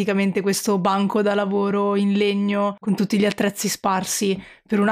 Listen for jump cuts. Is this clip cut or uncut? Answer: uncut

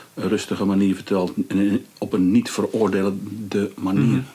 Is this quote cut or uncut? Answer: uncut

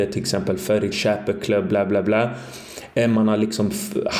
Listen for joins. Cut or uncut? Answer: cut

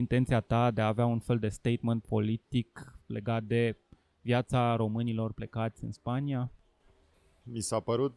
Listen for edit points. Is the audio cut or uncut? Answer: uncut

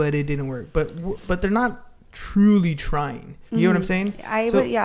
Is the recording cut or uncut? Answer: cut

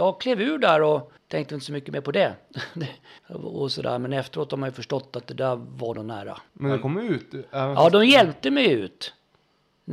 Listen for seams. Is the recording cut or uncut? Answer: cut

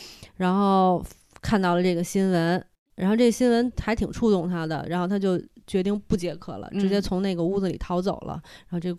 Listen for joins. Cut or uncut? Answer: uncut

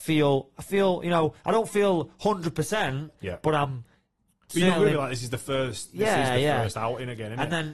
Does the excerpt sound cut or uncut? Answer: uncut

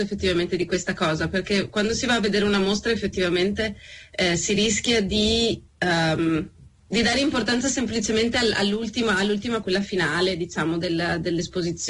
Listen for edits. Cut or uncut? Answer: cut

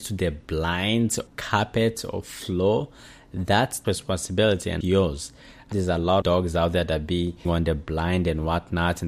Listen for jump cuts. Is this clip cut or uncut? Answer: cut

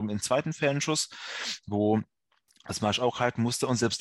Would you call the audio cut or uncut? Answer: uncut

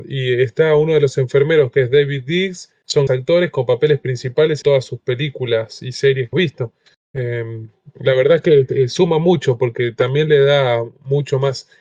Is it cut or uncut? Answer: cut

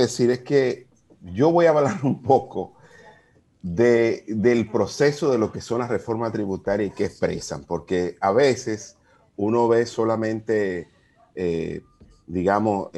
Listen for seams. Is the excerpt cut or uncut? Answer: uncut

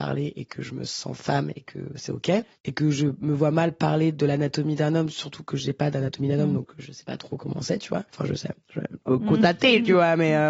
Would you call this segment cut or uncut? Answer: cut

